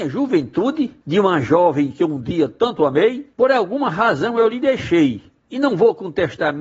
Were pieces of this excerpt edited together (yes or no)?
yes